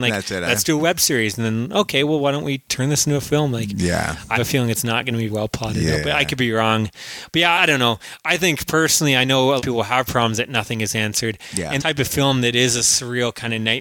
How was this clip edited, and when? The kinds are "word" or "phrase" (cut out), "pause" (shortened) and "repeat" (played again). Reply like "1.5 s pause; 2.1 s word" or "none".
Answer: 4.3 s word; 5.3 s word; 7.6 s word; 9.6 s word; 11.8 s word